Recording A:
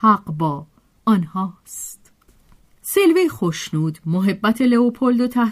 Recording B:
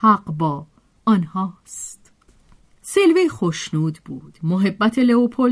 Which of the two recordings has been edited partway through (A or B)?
A